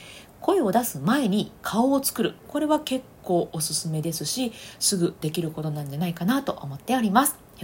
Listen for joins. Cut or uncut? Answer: cut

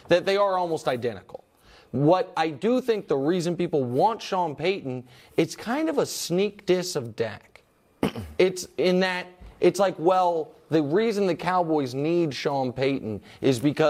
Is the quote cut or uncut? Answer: uncut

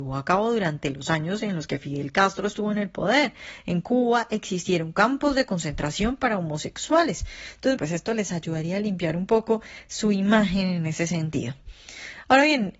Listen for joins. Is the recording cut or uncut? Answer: cut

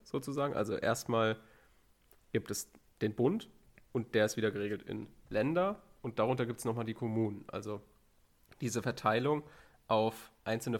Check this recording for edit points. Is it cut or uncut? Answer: uncut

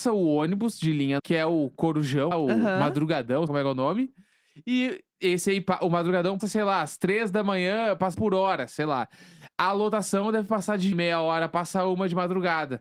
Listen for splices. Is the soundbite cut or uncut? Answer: cut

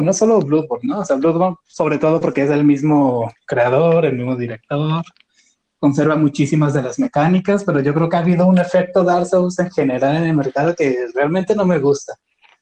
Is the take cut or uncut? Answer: uncut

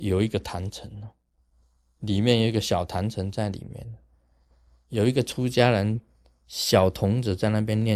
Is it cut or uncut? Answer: uncut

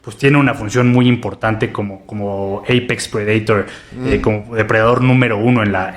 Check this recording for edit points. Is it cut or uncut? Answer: uncut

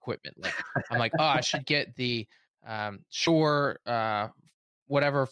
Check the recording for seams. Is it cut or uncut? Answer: uncut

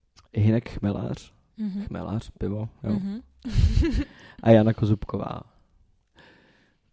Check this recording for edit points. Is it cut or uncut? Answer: uncut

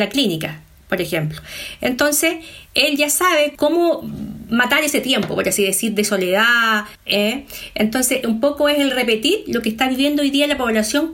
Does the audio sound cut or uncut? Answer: cut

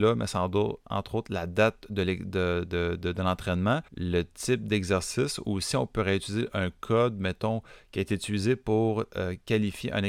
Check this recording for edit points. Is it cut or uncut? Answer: cut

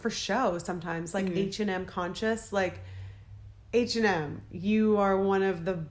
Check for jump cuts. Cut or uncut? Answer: uncut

